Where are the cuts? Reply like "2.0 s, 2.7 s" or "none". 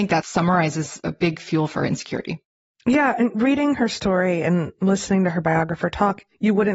none